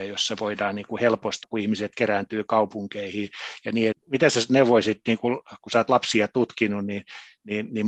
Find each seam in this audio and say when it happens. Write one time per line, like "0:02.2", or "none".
0:01.4
0:03.9

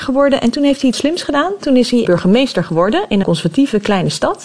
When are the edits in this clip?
0:00.9
0:02.0
0:03.2

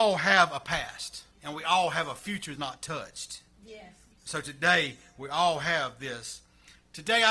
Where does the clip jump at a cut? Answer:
0:01.3
0:02.6
0:04.1

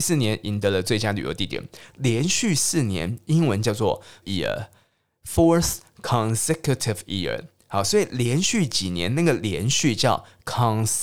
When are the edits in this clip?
0:04.2

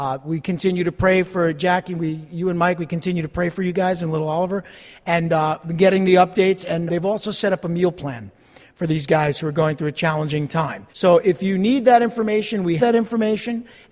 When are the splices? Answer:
0:06.9
0:10.9
0:12.8

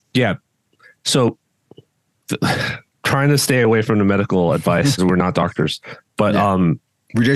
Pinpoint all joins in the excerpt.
0:05.0

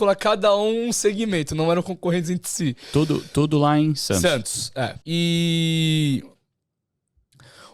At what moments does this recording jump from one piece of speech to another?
0:05.0

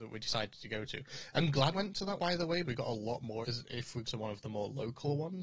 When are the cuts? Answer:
0:01.7
0:02.2
0:02.6
0:03.4
0:04.1

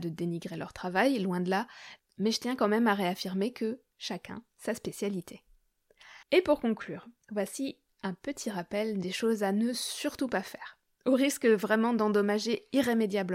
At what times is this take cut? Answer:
0:06.2

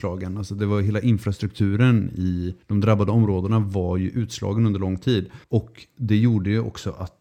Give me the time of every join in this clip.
0:02.6
0:05.4

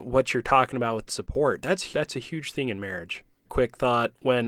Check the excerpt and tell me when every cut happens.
0:01.1
0:01.9
0:03.5

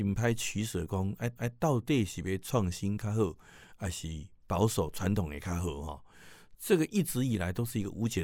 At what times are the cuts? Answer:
0:01.4

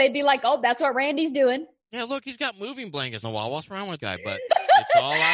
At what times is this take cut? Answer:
0:03.2
0:04.0

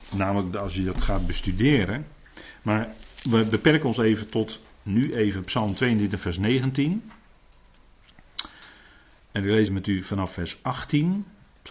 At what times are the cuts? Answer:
0:09.7

